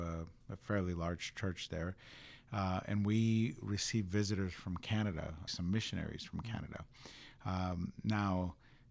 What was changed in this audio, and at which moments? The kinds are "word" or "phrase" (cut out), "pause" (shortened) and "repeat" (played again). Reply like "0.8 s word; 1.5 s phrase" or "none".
5.5 s word